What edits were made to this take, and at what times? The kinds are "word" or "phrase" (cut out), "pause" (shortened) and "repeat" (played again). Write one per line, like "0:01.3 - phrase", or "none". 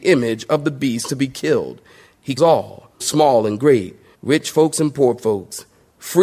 0:02.4 - word
0:03.0 - word
0:04.1 - pause